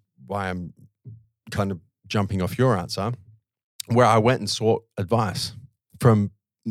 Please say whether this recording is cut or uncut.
uncut